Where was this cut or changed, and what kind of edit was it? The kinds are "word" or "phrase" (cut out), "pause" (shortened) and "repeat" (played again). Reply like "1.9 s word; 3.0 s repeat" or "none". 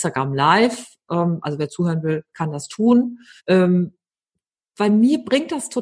3.4 s pause

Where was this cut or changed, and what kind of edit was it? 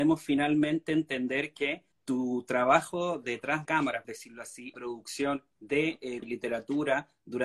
1.9 s word; 3.6 s word; 4.0 s word; 4.7 s phrase; 5.5 s pause; 6.2 s word

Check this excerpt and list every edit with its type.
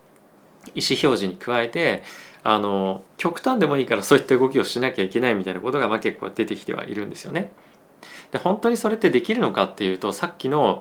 3.1 s pause

